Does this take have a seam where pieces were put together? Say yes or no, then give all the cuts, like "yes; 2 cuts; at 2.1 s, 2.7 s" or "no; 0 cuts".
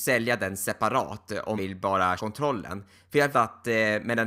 yes; 3 cuts; at 1.6 s, 2.2 s, 3.3 s